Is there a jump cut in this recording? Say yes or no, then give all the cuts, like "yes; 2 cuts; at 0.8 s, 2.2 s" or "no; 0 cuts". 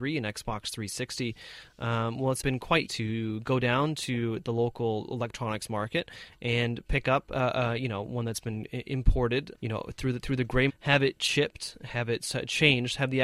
yes; 4 cuts; at 2.4 s, 2.9 s, 9.5 s, 10.7 s